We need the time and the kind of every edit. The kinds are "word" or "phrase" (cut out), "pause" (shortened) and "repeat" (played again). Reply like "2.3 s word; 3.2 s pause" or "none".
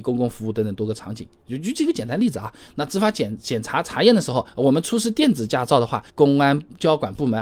4.5 s pause; 6.1 s pause